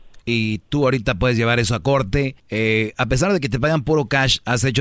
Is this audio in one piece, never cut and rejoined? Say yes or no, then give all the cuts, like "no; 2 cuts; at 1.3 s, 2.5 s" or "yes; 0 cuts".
no; 1 cut; at 2.4 s